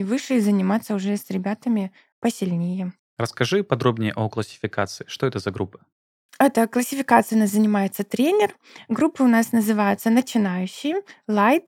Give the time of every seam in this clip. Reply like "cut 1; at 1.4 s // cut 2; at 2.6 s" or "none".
none